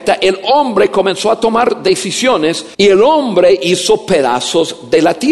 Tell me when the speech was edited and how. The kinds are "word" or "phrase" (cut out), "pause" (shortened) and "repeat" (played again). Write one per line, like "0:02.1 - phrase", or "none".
0:02.7 - pause